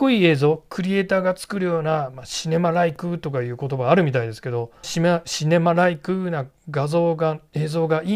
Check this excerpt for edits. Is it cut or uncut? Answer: cut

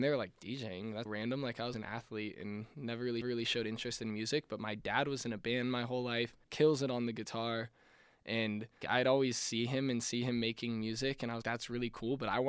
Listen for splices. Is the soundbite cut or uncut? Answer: cut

